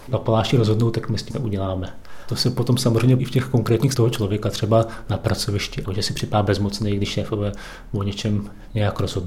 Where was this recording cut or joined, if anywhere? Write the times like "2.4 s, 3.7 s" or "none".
1.3 s, 3.2 s, 3.9 s, 5.9 s